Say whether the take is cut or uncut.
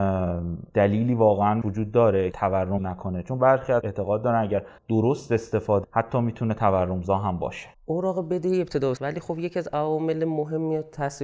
cut